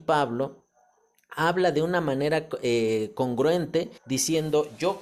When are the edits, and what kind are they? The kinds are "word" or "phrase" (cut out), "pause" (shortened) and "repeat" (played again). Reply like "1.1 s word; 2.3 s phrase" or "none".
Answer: 4.0 s pause